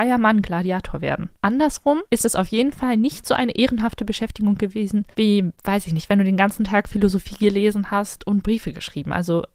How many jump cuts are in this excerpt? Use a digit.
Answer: 1